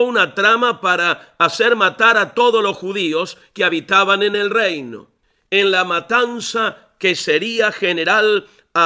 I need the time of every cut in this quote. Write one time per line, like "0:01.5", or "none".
none